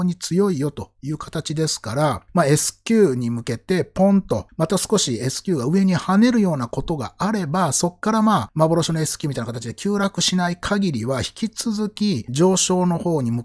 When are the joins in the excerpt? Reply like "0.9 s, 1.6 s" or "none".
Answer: none